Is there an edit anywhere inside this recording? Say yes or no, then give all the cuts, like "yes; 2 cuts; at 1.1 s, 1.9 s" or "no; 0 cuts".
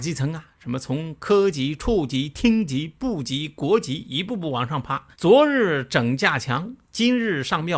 yes; 1 cut; at 5.1 s